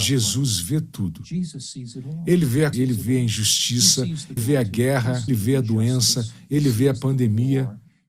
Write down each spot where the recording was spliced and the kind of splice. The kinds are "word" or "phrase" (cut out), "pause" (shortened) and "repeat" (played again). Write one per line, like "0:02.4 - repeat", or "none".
0:02.7 - word
0:04.4 - word
0:05.3 - word